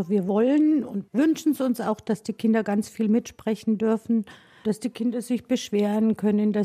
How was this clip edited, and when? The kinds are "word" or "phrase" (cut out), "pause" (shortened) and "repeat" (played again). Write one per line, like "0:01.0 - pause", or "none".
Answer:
none